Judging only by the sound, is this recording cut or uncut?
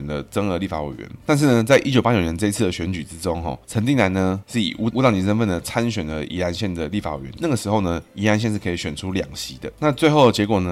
uncut